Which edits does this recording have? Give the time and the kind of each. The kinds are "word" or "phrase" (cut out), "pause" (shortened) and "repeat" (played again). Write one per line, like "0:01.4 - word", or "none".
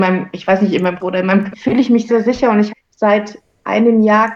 0:01.0 - word
0:01.5 - word
0:02.1 - word
0:02.7 - word